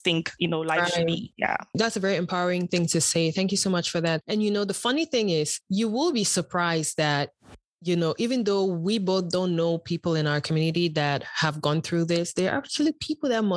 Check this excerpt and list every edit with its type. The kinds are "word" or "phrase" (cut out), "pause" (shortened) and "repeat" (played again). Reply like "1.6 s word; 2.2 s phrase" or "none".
none